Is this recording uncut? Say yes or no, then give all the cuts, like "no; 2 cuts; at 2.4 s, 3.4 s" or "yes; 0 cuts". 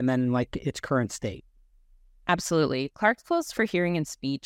yes; 0 cuts